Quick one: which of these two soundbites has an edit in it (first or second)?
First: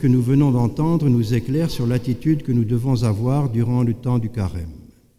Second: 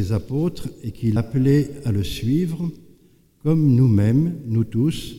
second